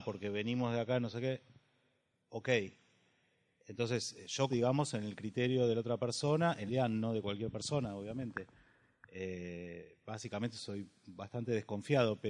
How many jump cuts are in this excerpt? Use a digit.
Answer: 2